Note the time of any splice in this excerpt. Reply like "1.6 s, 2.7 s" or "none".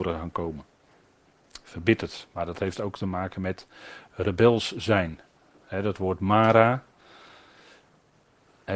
none